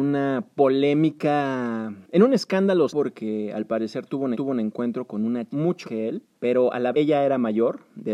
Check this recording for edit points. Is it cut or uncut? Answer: cut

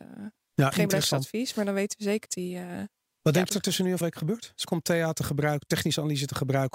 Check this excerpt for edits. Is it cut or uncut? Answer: cut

